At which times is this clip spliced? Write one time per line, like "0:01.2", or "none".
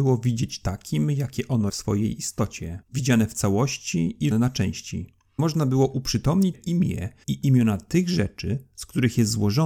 0:01.7
0:02.8
0:04.3
0:05.4
0:06.5
0:07.2